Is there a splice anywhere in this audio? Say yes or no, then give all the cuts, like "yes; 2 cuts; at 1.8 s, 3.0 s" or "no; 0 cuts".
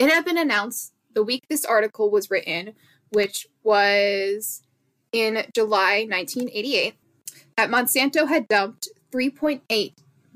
no; 0 cuts